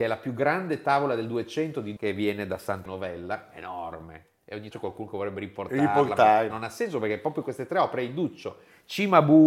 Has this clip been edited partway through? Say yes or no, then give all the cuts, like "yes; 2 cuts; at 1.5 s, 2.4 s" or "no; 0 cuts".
yes; 4 cuts; at 2.0 s, 2.9 s, 4.7 s, 6.5 s